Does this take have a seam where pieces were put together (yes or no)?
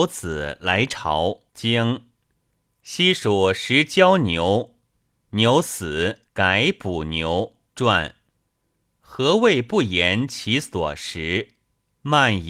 yes